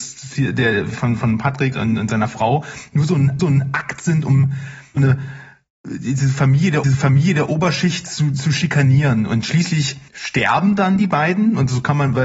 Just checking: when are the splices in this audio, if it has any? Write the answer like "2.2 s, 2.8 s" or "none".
1.7 s, 3.4 s, 5.0 s, 6.8 s, 10.1 s

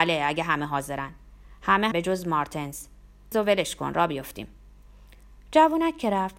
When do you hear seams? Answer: 1.9 s, 3.3 s

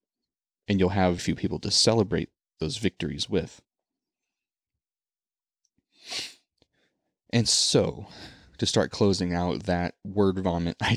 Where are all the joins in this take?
1.2 s

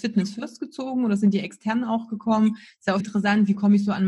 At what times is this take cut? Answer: 3.0 s

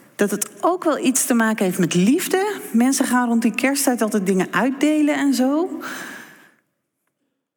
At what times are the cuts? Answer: none

